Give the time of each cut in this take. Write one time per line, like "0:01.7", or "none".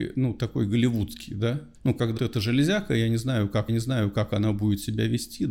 0:01.7
0:02.2
0:03.7